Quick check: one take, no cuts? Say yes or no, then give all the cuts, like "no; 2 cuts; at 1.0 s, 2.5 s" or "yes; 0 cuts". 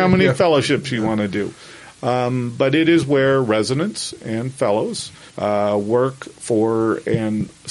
no; 1 cut; at 5.3 s